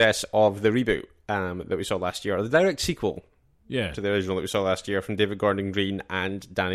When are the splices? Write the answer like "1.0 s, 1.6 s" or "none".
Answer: none